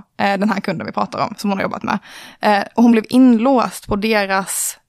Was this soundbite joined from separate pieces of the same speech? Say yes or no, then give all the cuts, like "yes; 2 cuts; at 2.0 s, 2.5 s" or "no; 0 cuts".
no; 0 cuts